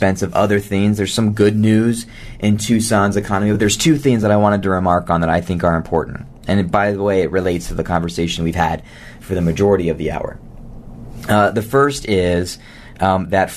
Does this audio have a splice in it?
no; 0 cuts

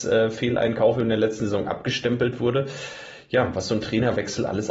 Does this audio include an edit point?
no; 0 cuts

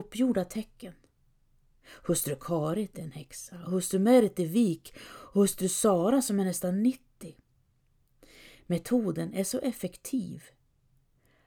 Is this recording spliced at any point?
no; 0 cuts

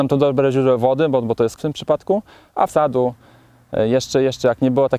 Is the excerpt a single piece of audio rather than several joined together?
no; 2 cuts; at 1.6 s, 2.7 s

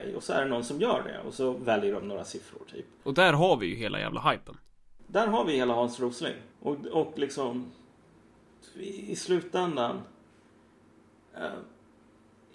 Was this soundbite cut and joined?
yes; 1 cut; at 6.5 s

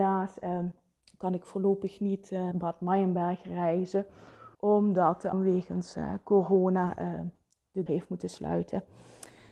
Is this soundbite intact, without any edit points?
no; 5 cuts; at 1.0 s, 2.5 s, 4.5 s, 5.3 s, 7.9 s

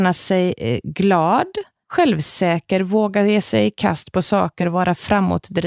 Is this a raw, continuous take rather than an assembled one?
yes; 0 cuts

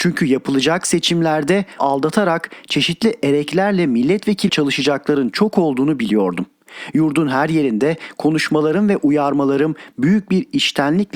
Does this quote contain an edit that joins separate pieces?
yes; 2 cuts; at 1.8 s, 4.5 s

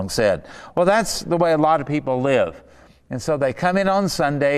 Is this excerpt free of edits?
yes; 0 cuts

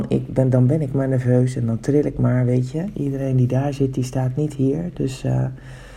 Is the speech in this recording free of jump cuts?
yes; 0 cuts

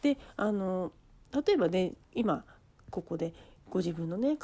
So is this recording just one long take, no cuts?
yes; 0 cuts

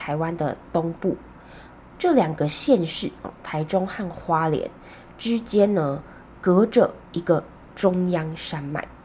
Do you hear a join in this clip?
no; 0 cuts

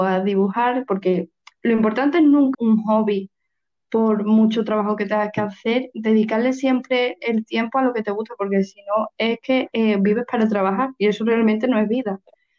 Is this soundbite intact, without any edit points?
no; 1 cut; at 2.5 s

